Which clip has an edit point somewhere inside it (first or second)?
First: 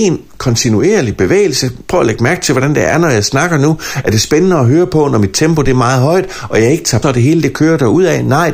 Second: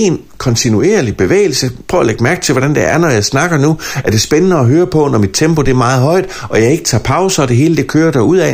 first